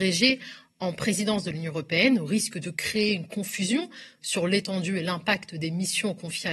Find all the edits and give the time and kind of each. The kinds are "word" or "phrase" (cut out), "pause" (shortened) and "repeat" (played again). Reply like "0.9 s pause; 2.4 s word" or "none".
none